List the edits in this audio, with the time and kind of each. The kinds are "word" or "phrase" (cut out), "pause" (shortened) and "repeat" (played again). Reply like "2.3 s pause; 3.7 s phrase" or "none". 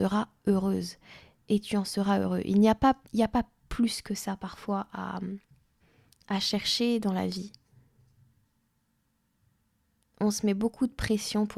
3.0 s pause; 5.8 s pause

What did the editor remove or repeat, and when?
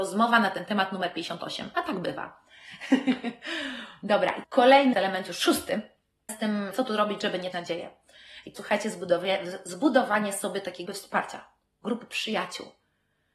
4.4 s word; 4.9 s word; 6.3 s word; 6.7 s word; 7.5 s word; 8.6 s word; 10.9 s word

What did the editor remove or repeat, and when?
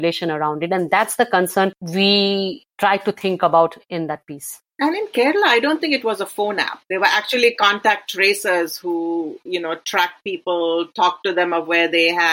1.8 s pause; 4.7 s pause; 6.8 s pause

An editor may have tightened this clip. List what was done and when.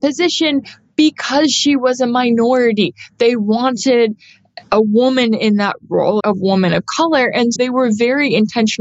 6.2 s word; 7.6 s word

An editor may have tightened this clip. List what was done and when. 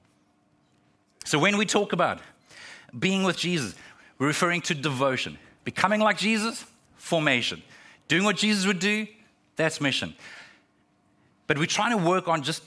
none

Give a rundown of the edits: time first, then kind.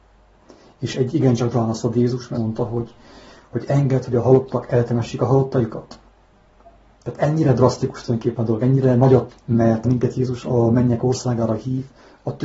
0.9 s word; 1.5 s word; 2.3 s word; 9.3 s word; 9.8 s word

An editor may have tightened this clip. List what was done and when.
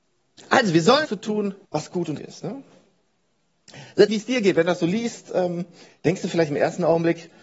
1.0 s phrase; 1.6 s pause; 2.2 s word; 4.1 s phrase

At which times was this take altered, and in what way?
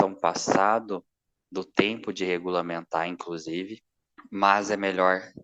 none

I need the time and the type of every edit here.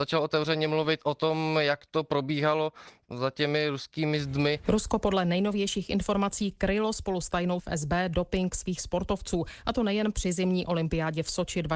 7.6 s word

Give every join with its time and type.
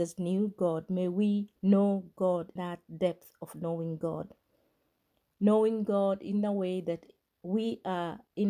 1.6 s pause; 2.6 s word

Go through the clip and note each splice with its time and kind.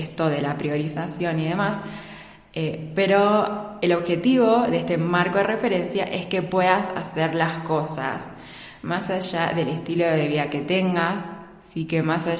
none

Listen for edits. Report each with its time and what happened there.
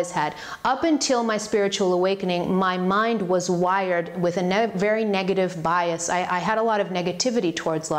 none

